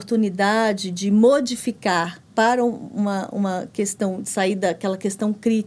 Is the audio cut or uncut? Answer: cut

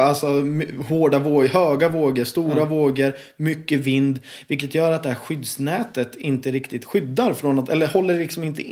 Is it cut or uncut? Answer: uncut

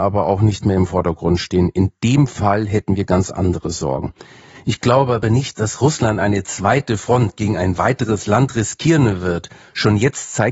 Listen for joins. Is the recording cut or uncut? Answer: uncut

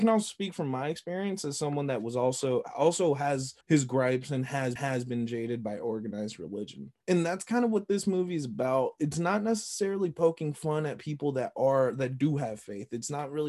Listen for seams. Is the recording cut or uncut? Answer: cut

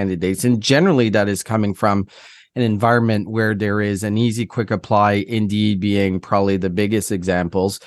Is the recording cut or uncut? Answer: uncut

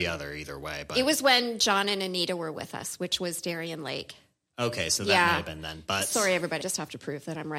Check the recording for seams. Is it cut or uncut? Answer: cut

